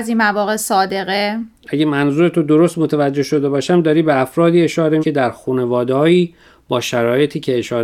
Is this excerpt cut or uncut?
cut